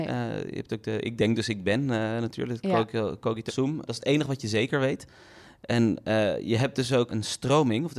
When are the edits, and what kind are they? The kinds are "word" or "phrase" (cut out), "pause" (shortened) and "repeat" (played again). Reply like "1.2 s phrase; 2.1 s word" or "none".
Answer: 3.5 s word; 3.9 s word; 7.1 s word